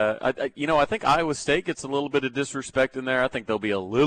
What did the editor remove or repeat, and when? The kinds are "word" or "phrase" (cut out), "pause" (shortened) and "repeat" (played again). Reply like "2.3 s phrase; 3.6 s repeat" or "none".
none

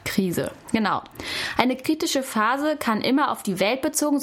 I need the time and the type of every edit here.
none

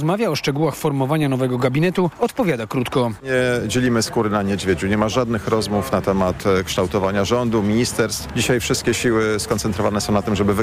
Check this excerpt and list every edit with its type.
none

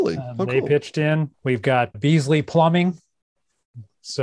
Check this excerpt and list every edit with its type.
1.3 s pause; 1.9 s word

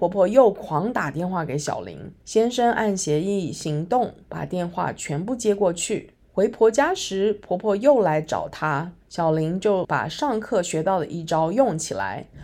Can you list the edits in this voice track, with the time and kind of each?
2.2 s pause; 4.2 s pause; 6.2 s pause; 9.0 s pause

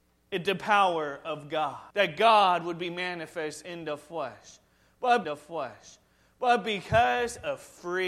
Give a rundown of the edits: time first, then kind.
1.9 s pause; 5.2 s repeat

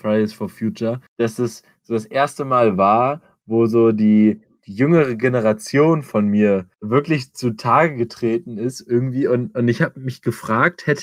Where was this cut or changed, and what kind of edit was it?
1.1 s pause

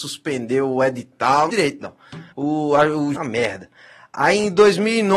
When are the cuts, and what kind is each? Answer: 1.5 s phrase; 2.3 s pause; 3.2 s phrase

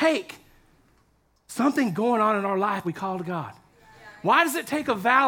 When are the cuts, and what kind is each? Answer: 1.9 s word; 2.8 s word

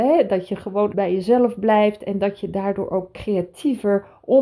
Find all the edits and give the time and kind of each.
0.9 s word

